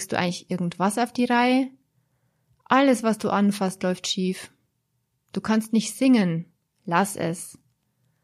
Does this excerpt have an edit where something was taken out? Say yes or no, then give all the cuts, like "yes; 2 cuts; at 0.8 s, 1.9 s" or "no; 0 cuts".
no; 0 cuts